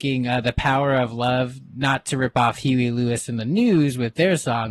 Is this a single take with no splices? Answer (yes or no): yes